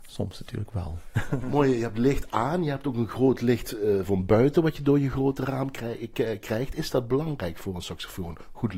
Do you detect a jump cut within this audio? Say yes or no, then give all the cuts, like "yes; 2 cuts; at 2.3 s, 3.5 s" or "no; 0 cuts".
no; 0 cuts